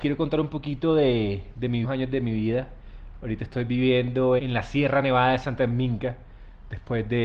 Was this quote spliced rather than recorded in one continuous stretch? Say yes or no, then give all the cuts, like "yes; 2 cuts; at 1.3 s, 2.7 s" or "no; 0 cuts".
yes; 3 cuts; at 1.8 s, 4.4 s, 5.6 s